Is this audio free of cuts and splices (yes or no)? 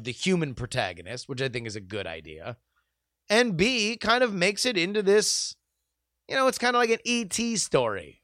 yes